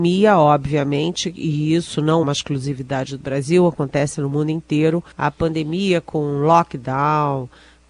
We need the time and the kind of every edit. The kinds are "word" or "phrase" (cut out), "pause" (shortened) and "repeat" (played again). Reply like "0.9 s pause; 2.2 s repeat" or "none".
2.2 s word; 5.1 s pause